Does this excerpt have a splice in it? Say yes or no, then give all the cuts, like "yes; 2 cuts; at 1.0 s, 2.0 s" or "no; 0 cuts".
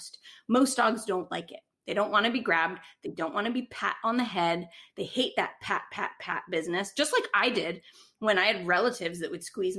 no; 0 cuts